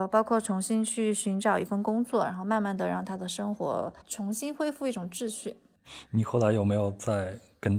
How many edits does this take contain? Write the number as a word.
one